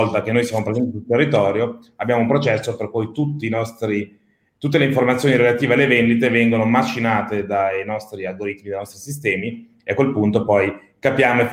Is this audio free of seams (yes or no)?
yes